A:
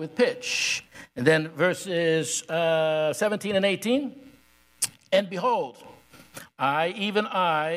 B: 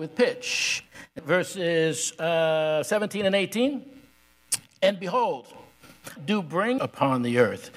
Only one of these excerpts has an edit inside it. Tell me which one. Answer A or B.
B